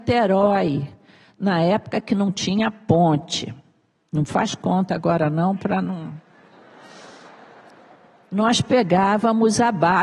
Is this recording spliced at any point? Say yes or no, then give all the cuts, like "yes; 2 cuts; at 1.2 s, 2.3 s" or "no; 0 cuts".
no; 0 cuts